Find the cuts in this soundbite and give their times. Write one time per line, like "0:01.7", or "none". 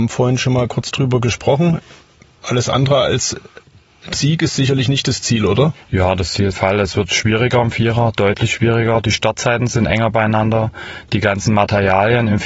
0:04.1
0:06.5